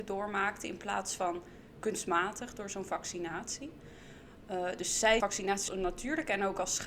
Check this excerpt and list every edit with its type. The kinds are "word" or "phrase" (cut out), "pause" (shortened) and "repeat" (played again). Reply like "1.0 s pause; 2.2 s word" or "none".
5.2 s word; 5.7 s word